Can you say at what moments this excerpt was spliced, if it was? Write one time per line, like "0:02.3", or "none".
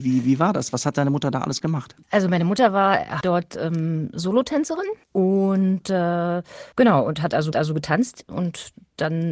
0:02.0
0:03.2
0:05.0
0:06.7
0:07.5